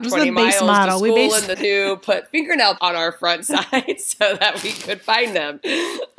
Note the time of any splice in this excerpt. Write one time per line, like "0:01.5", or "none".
0:01.5
0:02.8